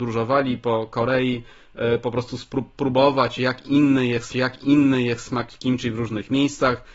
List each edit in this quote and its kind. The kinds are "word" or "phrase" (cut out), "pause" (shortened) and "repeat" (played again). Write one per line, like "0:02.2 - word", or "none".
0:04.3 - repeat